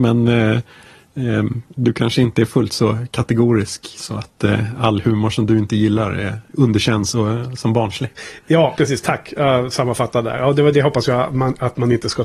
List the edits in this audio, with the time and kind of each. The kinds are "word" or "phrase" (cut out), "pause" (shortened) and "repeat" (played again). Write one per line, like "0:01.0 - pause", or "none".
none